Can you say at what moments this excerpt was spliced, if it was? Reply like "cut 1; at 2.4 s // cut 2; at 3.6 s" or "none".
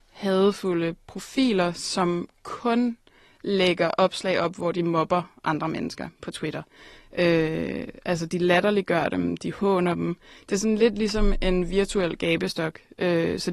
none